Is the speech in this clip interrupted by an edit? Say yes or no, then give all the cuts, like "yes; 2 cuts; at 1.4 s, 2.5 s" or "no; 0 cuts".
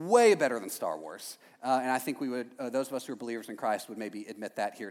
no; 0 cuts